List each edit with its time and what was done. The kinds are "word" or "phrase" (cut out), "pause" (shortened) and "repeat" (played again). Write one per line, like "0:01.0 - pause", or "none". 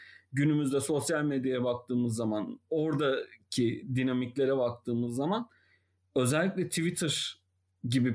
none